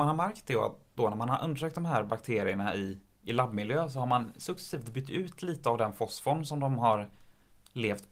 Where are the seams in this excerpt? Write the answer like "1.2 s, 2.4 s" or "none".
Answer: none